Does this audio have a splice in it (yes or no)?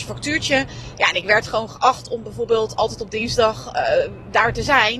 no